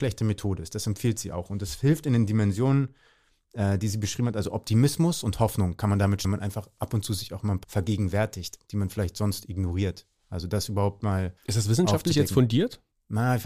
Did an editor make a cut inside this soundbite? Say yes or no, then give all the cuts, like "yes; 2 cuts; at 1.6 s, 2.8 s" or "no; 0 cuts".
yes; 3 cuts; at 6.2 s, 7.6 s, 11.4 s